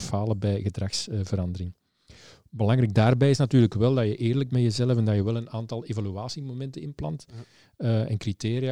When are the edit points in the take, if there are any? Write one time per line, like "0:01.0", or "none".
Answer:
0:04.5